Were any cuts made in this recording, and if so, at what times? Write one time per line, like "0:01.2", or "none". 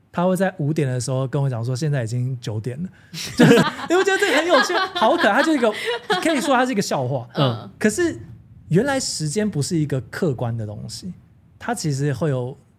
0:03.6